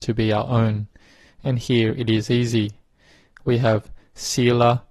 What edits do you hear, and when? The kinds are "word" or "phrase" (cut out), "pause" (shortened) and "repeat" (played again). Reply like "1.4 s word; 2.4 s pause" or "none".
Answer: none